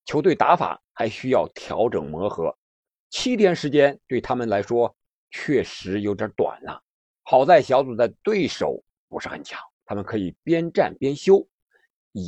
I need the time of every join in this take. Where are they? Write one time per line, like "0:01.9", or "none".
0:09.7